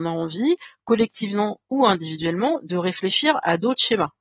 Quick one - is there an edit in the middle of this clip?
no; 0 cuts

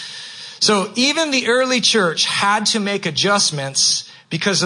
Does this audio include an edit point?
no; 0 cuts

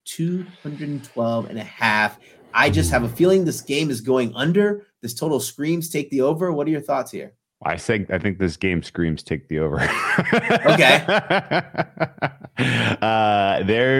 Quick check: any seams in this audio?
no; 0 cuts

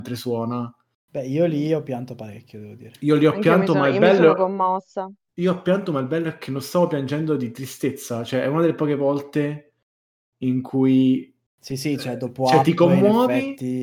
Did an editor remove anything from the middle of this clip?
no; 0 cuts

